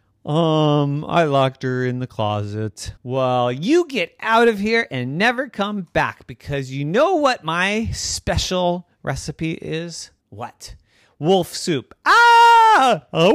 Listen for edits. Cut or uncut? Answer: cut